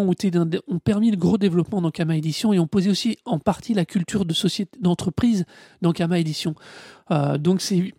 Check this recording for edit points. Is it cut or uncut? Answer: uncut